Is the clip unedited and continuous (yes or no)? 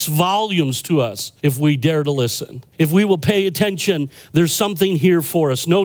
no